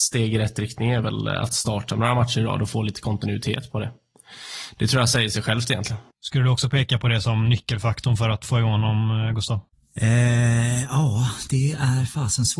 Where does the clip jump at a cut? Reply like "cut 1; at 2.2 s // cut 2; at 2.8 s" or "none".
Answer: cut 1; at 6.1 s // cut 2; at 9.7 s